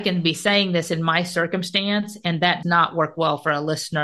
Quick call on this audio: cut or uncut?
cut